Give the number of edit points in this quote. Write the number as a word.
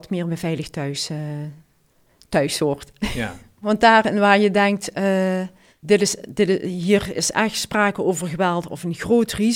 zero